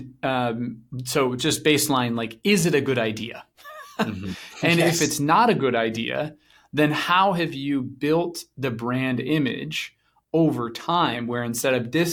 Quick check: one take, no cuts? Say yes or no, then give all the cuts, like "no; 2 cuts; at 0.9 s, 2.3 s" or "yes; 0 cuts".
yes; 0 cuts